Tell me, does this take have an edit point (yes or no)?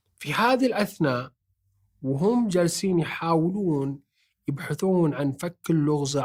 no